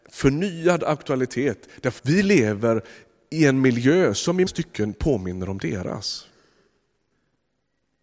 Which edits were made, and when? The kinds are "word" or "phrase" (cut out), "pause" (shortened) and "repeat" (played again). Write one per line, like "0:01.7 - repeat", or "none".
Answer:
0:02.0 - word
0:04.5 - word